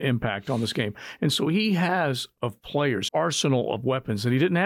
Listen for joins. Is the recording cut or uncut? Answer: cut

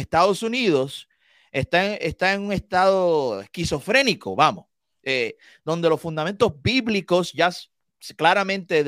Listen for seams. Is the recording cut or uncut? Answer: uncut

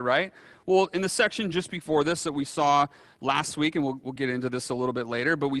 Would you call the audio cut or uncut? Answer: uncut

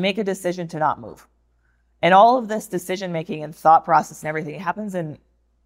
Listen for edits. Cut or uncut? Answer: uncut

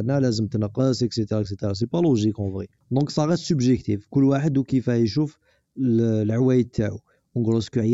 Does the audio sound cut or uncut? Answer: uncut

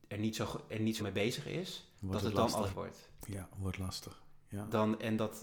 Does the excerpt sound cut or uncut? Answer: cut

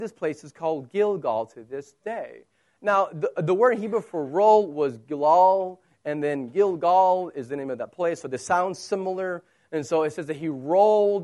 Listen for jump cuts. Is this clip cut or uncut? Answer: uncut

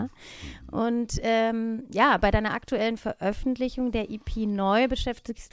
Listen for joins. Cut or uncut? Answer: uncut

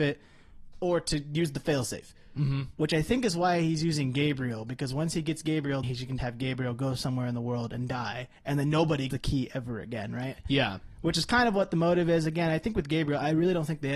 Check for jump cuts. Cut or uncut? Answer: cut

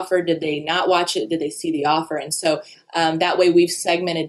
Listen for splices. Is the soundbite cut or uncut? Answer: uncut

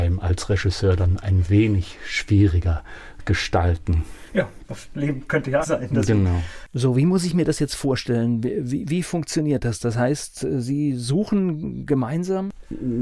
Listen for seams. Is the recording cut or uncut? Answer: cut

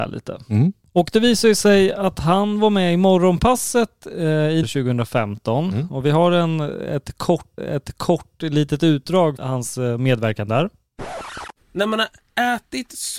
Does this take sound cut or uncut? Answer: cut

